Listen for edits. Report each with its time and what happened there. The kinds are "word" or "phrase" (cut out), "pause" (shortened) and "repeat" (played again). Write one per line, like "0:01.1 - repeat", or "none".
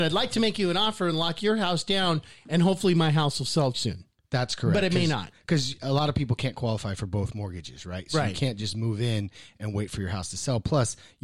0:03.7 - word